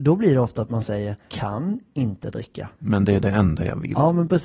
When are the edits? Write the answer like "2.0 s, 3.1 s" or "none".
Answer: 1.3 s, 2.7 s